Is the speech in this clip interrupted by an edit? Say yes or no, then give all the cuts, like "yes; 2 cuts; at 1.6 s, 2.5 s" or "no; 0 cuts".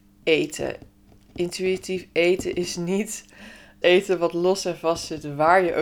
yes; 1 cut; at 3.8 s